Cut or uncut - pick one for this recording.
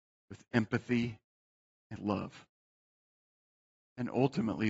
cut